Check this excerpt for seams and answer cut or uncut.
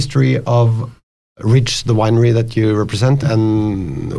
cut